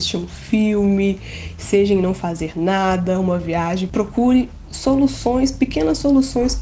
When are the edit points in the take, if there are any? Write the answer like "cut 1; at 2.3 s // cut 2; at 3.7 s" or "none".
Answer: none